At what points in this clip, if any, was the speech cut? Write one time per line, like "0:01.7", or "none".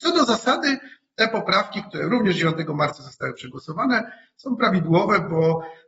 none